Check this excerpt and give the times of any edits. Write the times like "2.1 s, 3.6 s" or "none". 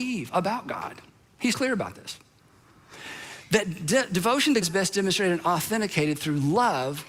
1.5 s, 4.6 s